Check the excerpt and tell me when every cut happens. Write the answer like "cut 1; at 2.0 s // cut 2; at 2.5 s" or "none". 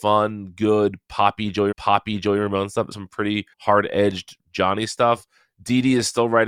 cut 1; at 1.7 s // cut 2; at 2.9 s // cut 3; at 3.5 s